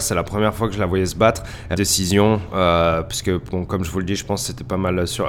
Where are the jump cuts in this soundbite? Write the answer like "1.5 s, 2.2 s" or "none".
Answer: 1.7 s